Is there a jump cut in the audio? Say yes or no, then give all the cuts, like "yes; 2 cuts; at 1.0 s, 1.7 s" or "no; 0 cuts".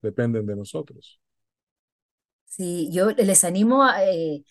no; 0 cuts